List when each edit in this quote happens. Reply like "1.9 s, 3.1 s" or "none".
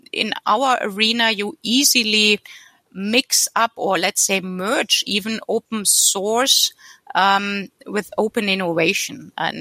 none